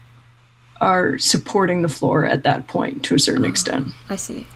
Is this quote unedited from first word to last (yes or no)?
yes